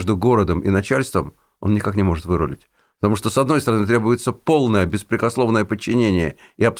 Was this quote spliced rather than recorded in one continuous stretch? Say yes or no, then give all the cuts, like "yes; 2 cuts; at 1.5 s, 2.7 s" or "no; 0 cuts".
no; 0 cuts